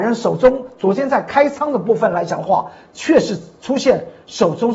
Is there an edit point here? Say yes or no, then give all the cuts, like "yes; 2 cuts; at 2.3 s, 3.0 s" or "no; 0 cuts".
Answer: no; 0 cuts